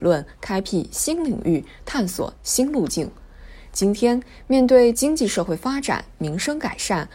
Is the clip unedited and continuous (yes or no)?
yes